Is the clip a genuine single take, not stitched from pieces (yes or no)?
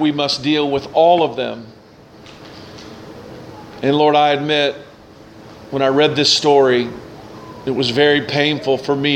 yes